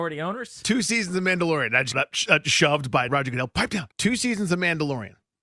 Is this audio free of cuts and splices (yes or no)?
no